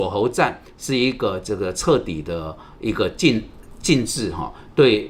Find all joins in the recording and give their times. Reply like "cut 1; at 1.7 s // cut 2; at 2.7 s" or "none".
none